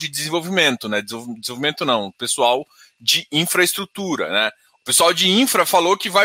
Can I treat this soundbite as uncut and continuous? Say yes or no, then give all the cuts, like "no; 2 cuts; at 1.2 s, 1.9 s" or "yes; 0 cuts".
yes; 0 cuts